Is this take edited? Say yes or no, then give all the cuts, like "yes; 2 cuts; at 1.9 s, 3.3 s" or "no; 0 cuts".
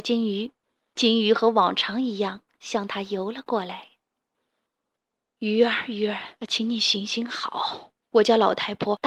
yes; 2 cuts; at 6.4 s, 8.0 s